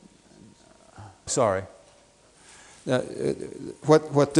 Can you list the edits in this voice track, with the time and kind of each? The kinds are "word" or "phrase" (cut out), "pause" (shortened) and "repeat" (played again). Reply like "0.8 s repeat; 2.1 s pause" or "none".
1.3 s word